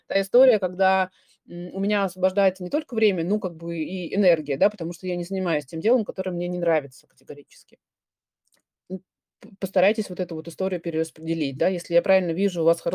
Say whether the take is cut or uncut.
uncut